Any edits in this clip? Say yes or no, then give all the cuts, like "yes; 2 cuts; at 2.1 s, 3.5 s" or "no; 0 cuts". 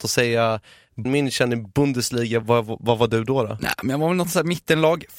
yes; 2 cuts; at 1.0 s, 2.4 s